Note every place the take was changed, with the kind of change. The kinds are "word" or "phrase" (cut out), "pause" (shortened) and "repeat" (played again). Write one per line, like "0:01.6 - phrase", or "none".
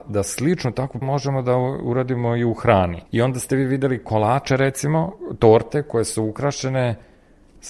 0:01.0 - word
0:03.1 - pause